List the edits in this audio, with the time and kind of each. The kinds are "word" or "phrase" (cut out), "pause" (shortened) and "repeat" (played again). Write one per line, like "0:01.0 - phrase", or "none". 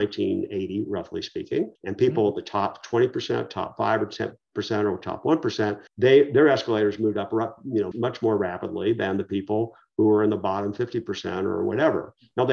0:01.8 - pause
0:05.9 - pause
0:07.9 - word